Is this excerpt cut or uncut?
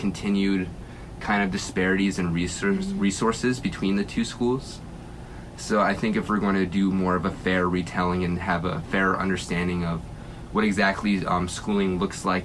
uncut